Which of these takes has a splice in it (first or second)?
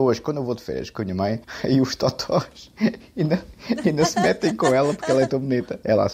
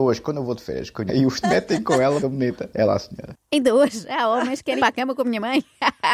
second